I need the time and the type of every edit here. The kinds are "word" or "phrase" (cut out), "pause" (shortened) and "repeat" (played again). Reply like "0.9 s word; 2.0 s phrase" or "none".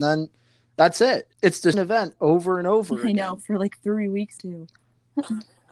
1.3 s pause; 1.7 s phrase; 4.4 s word; 4.8 s pause

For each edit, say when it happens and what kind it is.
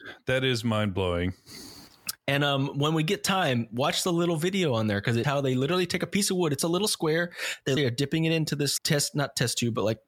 5.2 s word; 6.6 s word; 7.8 s word; 8.8 s word

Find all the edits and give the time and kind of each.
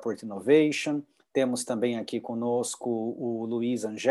none

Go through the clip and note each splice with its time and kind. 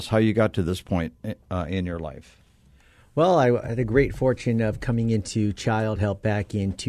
none

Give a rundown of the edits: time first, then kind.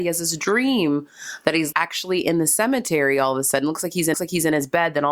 1.7 s word; 4.1 s repeat

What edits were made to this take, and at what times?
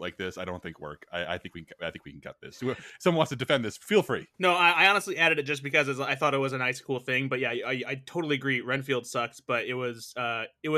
4.3 s pause

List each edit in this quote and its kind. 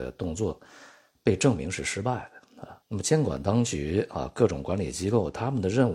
2.8 s pause

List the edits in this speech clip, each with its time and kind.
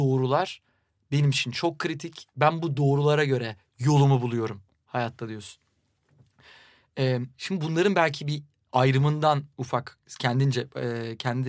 none

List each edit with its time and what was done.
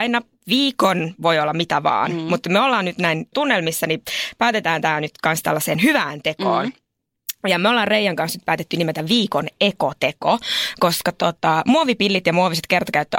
3.3 s word

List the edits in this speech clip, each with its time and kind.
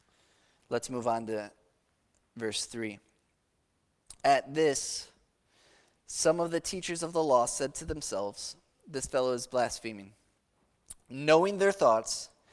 none

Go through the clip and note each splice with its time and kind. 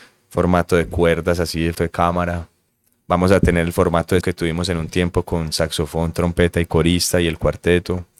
1.7 s word; 4.2 s word

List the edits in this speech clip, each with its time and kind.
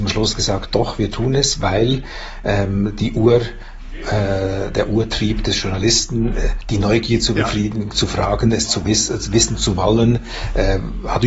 none

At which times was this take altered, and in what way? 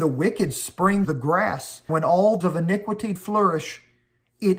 1.0 s word; 1.9 s word; 2.4 s word; 3.2 s word

